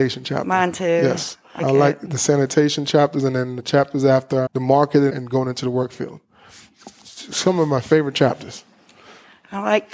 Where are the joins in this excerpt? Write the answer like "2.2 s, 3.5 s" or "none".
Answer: 1.6 s, 4.5 s, 5.1 s